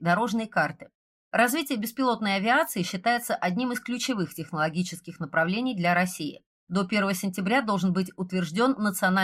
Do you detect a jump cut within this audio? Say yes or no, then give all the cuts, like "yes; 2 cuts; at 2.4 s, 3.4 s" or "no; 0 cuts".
no; 0 cuts